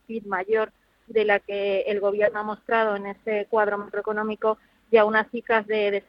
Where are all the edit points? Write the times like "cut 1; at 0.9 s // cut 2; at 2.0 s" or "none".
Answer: none

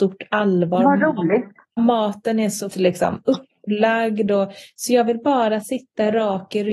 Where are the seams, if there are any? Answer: cut 1; at 1.8 s // cut 2; at 2.7 s

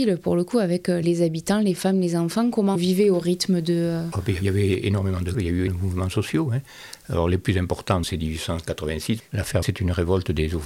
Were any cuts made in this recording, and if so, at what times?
cut 1; at 1.0 s // cut 2; at 2.8 s // cut 3; at 4.4 s // cut 4; at 5.3 s // cut 5; at 5.7 s // cut 6; at 8.0 s // cut 7; at 9.6 s

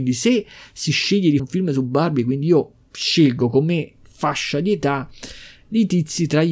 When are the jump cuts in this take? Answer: cut 1; at 1.4 s

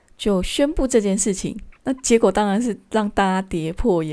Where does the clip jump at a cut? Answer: cut 1; at 1.8 s

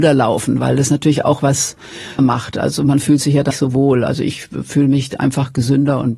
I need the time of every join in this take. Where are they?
cut 1; at 2.2 s // cut 2; at 3.5 s

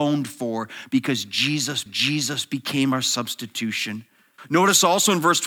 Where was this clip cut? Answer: cut 1; at 1.9 s // cut 2; at 4.4 s

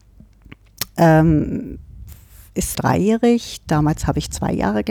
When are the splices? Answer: cut 1; at 2.7 s

